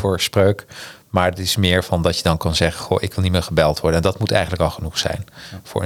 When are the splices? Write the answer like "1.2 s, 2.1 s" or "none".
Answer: none